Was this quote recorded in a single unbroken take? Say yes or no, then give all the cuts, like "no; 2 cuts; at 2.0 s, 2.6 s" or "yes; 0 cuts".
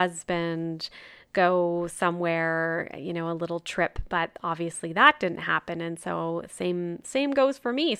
yes; 0 cuts